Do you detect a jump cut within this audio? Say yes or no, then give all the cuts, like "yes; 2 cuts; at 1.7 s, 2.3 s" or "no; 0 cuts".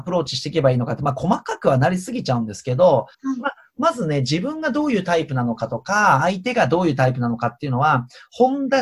yes; 1 cut; at 3.1 s